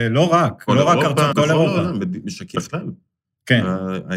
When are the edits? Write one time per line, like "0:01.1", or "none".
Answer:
0:01.3
0:02.5